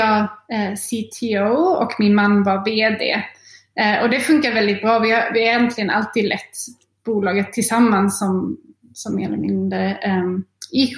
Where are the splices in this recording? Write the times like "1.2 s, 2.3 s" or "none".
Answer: none